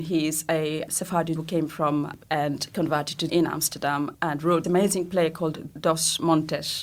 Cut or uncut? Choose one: cut